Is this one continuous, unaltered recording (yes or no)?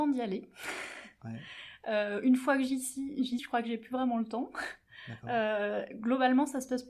no